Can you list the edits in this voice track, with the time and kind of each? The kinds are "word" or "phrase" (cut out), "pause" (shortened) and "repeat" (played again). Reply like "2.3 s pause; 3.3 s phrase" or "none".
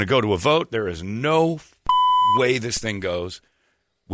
none